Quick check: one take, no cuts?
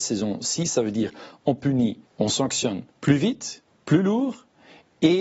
no; 3 cuts; at 2.1 s, 2.9 s, 3.7 s

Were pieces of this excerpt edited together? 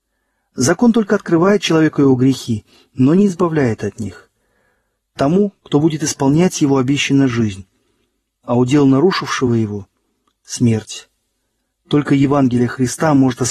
no; 0 cuts

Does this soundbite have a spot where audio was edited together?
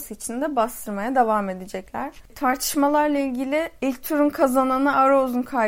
no; 0 cuts

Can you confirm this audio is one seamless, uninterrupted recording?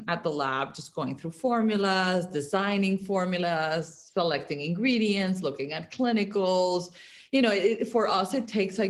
yes; 0 cuts

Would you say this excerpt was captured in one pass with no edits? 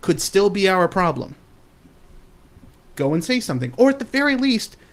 yes; 0 cuts

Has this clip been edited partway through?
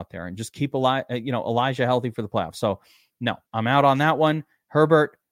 yes; 1 cut; at 3.5 s

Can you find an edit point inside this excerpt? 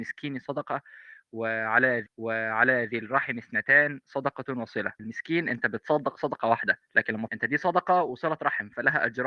yes; 3 cuts; at 2.1 s, 5.0 s, 7.3 s

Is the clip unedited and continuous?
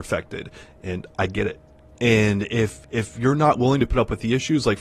yes; 0 cuts

